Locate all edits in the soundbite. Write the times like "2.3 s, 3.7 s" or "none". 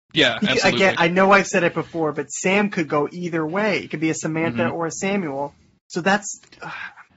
none